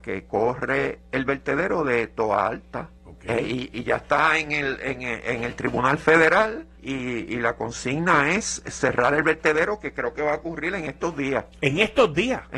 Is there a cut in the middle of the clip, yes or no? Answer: yes